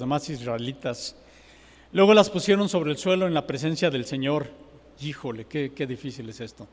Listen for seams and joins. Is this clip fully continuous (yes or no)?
yes